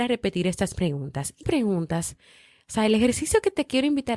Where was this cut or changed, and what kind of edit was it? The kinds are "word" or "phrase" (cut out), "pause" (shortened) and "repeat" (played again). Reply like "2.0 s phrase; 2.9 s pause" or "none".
1.4 s word